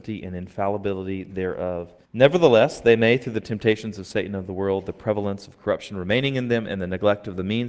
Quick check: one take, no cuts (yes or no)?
no